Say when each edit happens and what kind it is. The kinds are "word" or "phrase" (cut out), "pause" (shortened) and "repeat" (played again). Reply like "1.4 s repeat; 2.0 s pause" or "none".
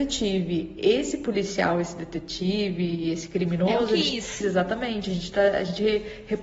4.4 s phrase